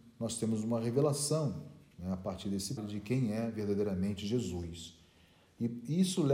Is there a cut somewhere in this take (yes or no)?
yes